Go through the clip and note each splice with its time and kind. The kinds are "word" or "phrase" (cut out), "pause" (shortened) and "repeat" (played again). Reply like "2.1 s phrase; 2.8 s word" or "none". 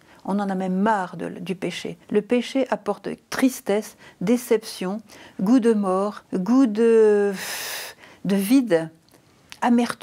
2.0 s pause; 6.2 s pause